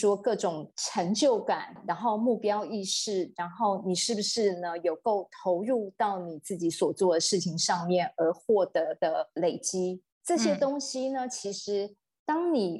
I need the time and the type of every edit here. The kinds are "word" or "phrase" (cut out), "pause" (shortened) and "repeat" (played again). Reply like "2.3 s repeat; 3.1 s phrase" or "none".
10.1 s pause

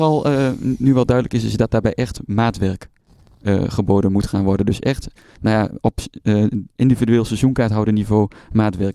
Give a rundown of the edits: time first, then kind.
5.8 s word

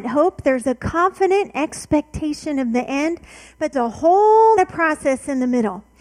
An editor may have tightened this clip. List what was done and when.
3.7 s word; 4.6 s word

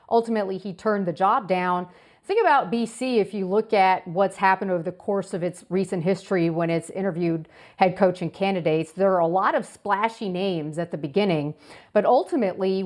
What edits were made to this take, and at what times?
none

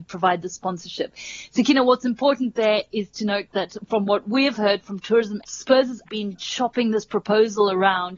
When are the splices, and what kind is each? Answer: 5.4 s word; 6.0 s word

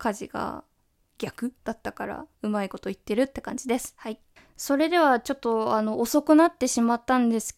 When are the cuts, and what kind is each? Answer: 1.6 s pause; 2.3 s pause; 4.4 s pause

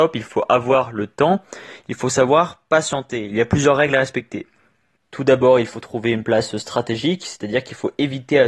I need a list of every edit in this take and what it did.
none

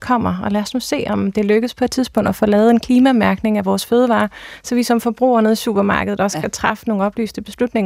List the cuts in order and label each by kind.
none

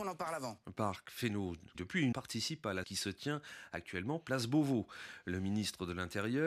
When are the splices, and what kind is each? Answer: 1.7 s word; 2.1 s word; 2.8 s phrase

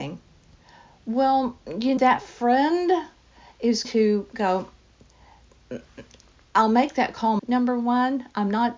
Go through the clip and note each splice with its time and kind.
2.0 s word; 3.8 s word; 7.4 s word

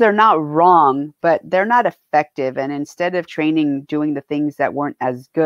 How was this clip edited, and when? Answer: 3.3 s word

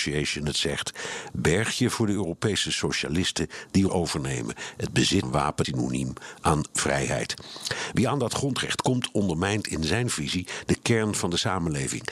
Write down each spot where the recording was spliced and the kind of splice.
3.9 s word; 5.2 s word; 5.6 s word

